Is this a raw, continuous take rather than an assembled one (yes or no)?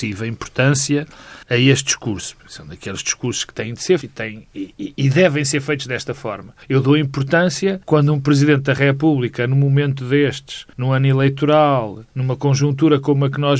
no